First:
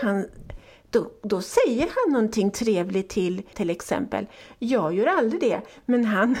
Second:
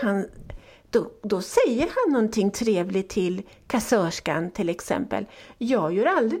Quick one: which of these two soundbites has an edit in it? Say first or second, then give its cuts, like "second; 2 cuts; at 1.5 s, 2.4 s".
first; 1 cut; at 3.5 s